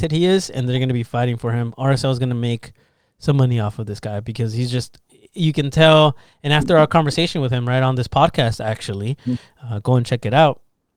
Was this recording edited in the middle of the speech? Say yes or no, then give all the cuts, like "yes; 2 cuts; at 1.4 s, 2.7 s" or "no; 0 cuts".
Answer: no; 0 cuts